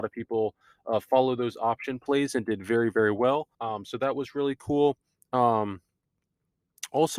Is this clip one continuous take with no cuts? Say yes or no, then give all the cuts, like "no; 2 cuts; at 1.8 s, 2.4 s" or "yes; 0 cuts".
no; 1 cut; at 3.5 s